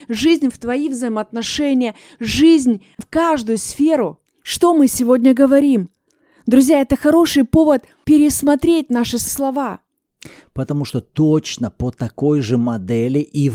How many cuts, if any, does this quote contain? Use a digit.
1